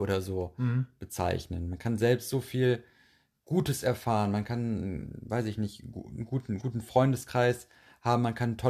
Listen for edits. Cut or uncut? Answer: uncut